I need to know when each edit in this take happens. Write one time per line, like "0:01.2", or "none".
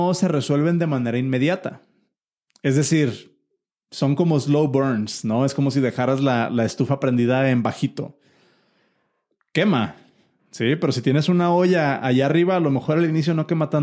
none